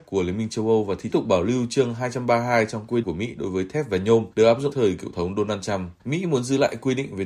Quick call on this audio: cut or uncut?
cut